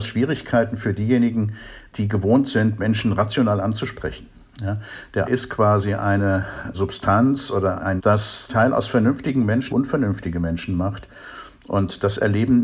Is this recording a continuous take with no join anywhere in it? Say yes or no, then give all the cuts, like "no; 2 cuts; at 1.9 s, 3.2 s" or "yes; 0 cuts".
no; 4 cuts; at 5.2 s, 8.0 s, 8.5 s, 9.7 s